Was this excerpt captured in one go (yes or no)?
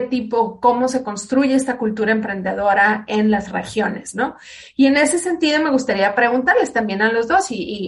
yes